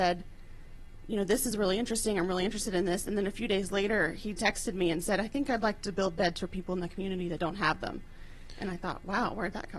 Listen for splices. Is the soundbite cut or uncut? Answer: uncut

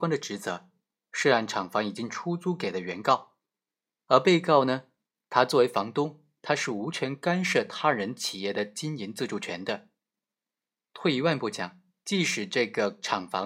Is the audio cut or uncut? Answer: uncut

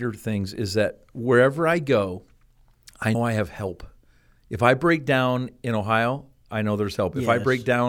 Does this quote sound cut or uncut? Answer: cut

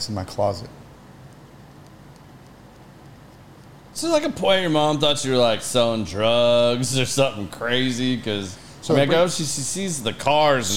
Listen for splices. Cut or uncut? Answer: uncut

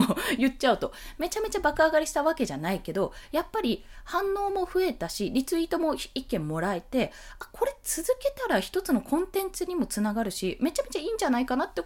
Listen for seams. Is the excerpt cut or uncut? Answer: uncut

